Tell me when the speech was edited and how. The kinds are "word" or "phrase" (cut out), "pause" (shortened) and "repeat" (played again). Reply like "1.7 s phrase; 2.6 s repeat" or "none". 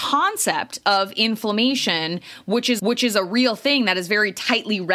2.8 s repeat